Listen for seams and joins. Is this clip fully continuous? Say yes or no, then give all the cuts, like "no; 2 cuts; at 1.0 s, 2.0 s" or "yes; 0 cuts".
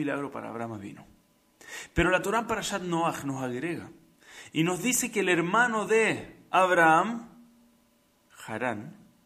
yes; 0 cuts